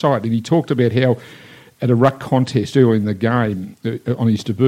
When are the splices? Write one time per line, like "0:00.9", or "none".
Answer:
none